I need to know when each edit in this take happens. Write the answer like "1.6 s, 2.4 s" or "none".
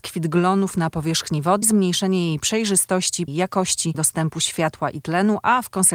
1.6 s, 3.3 s, 3.9 s